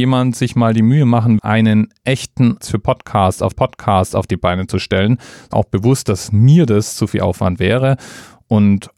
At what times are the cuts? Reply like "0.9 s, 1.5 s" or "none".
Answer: 1.4 s, 2.6 s, 3.5 s, 5.5 s